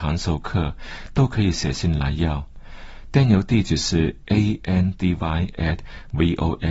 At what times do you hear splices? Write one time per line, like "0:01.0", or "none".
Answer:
none